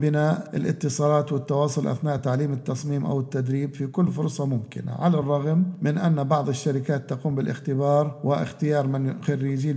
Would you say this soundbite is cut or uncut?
uncut